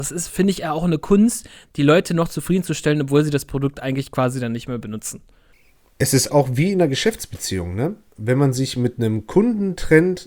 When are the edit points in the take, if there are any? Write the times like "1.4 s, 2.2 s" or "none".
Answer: 6.3 s